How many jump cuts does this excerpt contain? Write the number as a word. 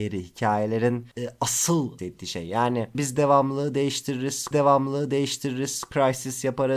four